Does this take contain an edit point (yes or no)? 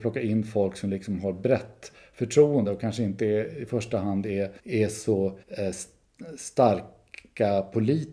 yes